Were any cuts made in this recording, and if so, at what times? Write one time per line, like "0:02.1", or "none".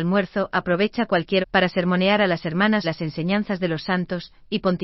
0:01.4
0:02.8